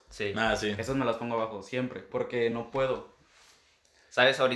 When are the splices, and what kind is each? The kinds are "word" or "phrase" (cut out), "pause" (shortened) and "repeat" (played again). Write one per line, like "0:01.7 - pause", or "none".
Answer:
none